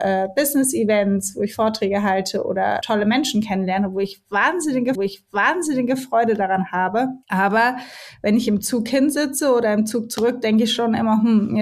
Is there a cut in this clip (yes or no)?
yes